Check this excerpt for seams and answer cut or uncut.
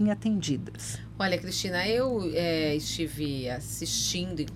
uncut